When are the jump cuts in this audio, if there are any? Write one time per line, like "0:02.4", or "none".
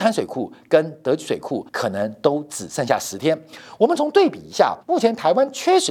0:01.7
0:04.8